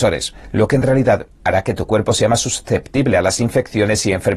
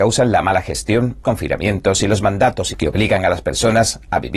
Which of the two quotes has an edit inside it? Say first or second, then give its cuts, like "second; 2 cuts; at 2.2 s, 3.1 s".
second; 2 cuts; at 1.2 s, 2.7 s